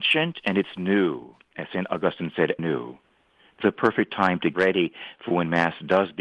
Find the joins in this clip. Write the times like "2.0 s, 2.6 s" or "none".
2.6 s, 3.6 s, 4.5 s

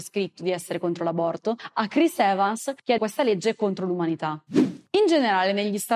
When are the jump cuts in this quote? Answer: 3.0 s

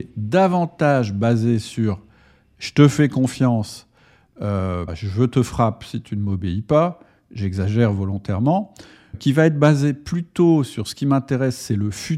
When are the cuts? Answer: 4.9 s, 9.1 s

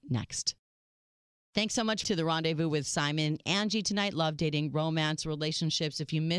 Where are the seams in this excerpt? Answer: 1.2 s, 2.0 s, 3.4 s

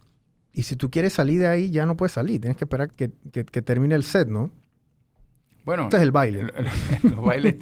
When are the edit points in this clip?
2.9 s, 5.9 s

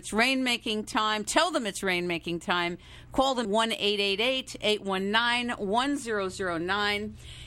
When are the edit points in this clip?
3.4 s

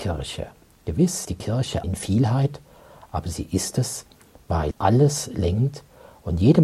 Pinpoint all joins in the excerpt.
1.2 s, 1.8 s, 4.7 s

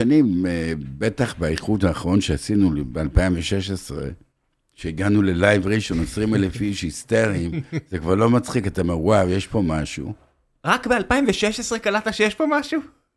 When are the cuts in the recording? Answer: none

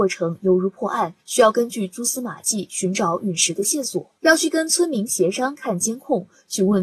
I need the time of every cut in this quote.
1.2 s, 4.2 s

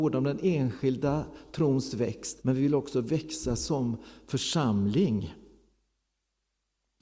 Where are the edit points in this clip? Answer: 2.4 s

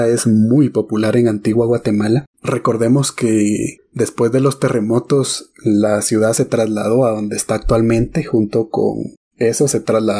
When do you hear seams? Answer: 2.3 s

